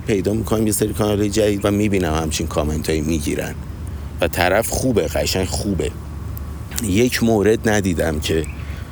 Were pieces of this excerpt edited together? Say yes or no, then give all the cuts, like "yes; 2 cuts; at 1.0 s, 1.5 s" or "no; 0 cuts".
yes; 1 cut; at 1.6 s